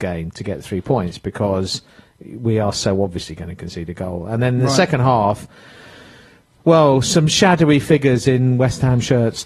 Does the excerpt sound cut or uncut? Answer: uncut